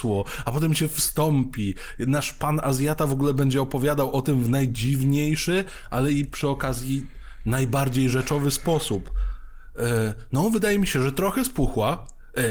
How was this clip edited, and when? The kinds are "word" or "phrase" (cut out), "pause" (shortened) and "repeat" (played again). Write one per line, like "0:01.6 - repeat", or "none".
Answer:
none